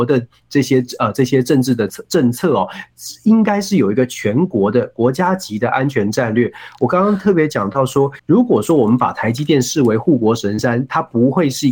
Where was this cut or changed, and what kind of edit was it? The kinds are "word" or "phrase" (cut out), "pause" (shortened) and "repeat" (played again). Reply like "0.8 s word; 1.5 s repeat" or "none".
8.2 s pause

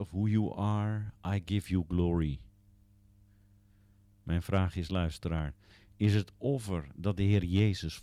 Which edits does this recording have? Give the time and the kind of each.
none

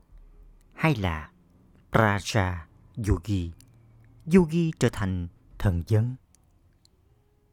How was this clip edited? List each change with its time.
none

